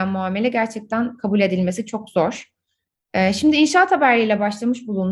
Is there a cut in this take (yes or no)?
no